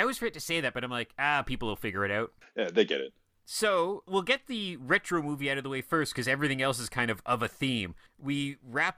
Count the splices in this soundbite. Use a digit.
0